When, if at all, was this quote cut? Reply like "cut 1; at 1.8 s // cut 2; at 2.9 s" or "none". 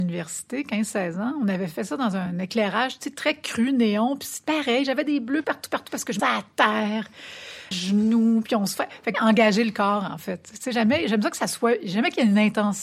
cut 1; at 5.4 s // cut 2; at 6.2 s // cut 3; at 7.7 s // cut 4; at 9.1 s